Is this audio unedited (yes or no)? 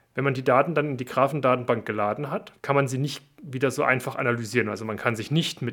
no